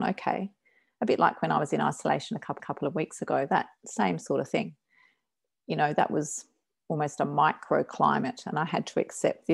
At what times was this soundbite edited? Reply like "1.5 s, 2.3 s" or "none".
2.6 s

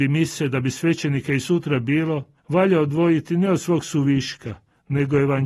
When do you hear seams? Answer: 2.4 s

